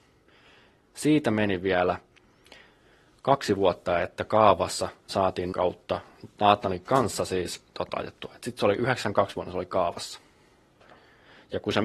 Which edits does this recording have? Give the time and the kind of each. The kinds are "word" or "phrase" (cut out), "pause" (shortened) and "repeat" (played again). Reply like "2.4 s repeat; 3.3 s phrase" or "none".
5.1 s word; 5.5 s word; 7.9 s word